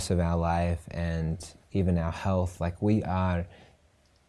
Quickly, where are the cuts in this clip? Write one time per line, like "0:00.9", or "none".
0:01.6